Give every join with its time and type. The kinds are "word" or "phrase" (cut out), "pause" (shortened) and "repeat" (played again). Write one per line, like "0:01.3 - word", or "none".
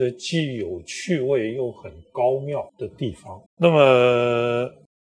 0:03.5 - pause

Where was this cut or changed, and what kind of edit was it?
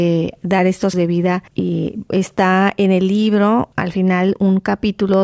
0:00.9 - word
0:01.5 - pause
0:03.7 - pause

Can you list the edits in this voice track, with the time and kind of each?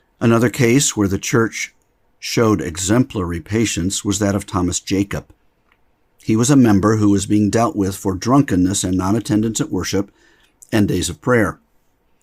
none

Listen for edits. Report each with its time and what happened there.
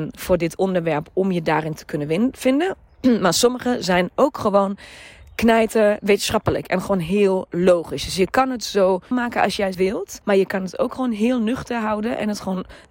0:09.1 - word
0:09.7 - word
0:10.2 - pause

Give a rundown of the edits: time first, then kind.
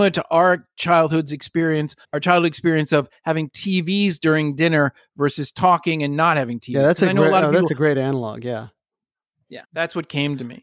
0:02.0 - pause
0:09.6 - pause

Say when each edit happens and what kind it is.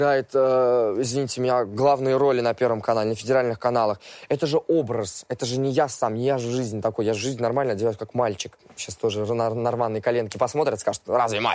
none

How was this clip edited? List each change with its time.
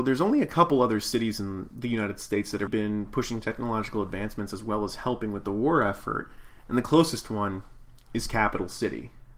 0:02.7 - word

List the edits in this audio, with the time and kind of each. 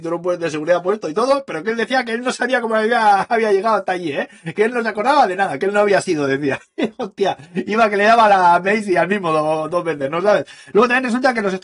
none

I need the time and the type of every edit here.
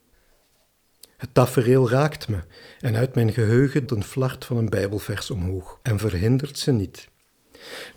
0:03.9 - word
0:05.8 - pause

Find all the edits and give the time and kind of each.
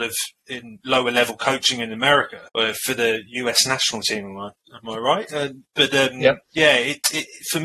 0:02.5 - pause
0:06.4 - pause

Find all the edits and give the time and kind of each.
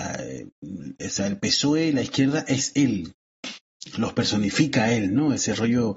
none

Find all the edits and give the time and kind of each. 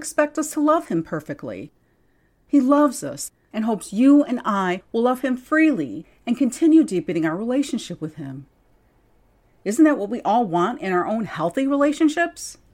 none

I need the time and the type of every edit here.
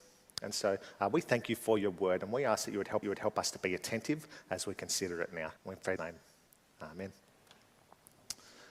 0:03.0 - repeat
0:05.6 - pause
0:06.0 - phrase

